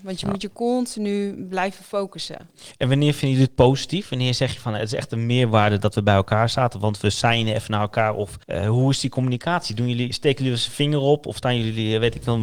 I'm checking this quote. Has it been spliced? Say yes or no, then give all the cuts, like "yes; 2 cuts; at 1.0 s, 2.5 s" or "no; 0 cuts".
yes; 1 cut; at 8.4 s